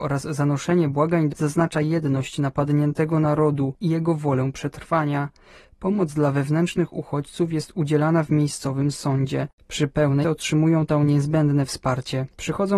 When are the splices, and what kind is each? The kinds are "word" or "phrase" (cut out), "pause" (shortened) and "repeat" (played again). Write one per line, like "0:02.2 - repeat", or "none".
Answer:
0:01.3 - word
0:10.2 - phrase